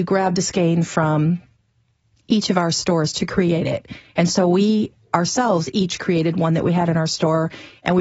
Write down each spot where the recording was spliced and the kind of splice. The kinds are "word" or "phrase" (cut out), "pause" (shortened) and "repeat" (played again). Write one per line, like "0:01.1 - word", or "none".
none